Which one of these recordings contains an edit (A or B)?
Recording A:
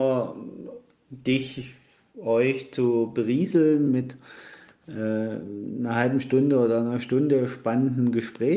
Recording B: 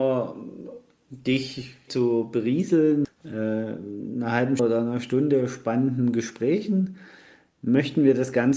B